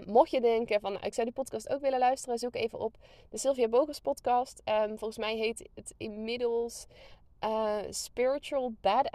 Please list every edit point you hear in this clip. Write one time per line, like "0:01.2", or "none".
none